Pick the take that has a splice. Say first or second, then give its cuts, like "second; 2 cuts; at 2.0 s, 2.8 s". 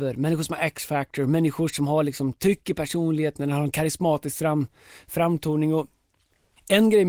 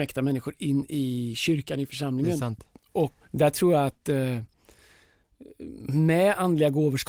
second; 1 cut; at 3.2 s